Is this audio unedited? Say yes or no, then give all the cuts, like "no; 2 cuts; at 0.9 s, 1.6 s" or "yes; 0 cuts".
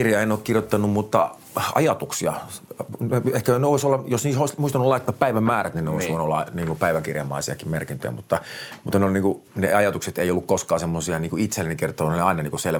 no; 1 cut; at 9.5 s